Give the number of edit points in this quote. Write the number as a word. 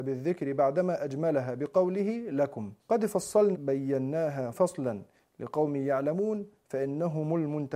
three